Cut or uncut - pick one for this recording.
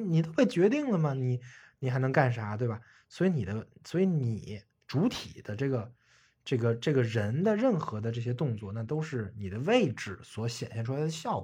uncut